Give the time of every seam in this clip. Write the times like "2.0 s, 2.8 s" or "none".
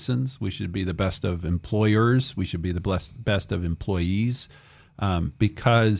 none